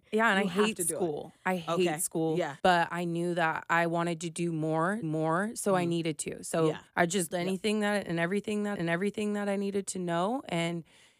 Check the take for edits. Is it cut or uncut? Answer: cut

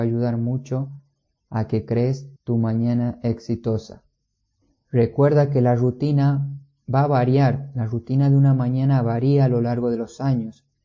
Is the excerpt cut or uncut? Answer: cut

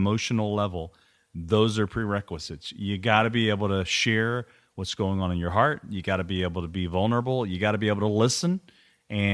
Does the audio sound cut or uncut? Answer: uncut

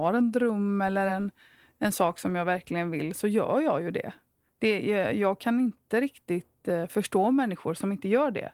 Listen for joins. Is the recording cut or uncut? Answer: uncut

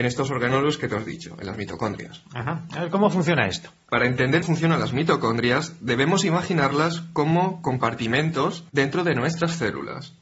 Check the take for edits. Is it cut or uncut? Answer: cut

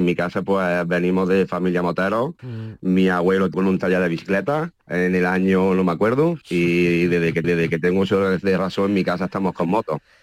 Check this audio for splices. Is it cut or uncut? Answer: cut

